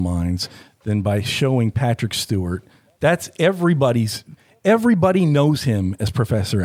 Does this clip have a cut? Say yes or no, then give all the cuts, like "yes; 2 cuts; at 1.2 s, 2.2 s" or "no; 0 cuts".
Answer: no; 0 cuts